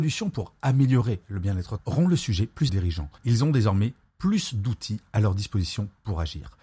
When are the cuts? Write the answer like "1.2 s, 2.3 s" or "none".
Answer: 1.8 s, 2.7 s, 3.2 s